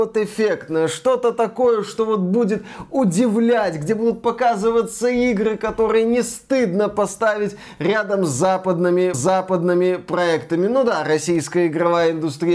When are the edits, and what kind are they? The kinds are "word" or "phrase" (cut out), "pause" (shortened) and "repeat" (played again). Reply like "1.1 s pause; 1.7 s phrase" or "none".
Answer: 9.1 s repeat